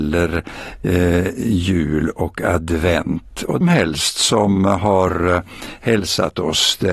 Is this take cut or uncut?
cut